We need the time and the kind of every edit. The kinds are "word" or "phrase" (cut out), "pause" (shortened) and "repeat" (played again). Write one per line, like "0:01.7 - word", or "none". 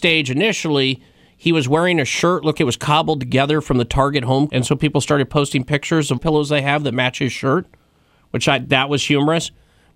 0:02.5 - word
0:04.5 - word
0:06.2 - phrase